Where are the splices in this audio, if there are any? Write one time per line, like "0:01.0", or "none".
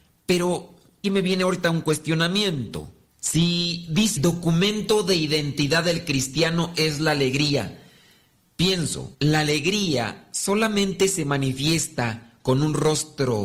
0:01.0
0:03.1
0:04.2
0:09.1